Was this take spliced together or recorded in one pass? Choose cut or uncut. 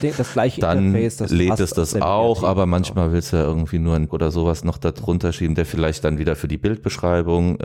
cut